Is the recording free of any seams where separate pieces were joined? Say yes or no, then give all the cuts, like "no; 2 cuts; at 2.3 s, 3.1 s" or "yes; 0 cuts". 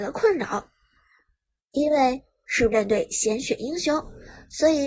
no; 1 cut; at 2.7 s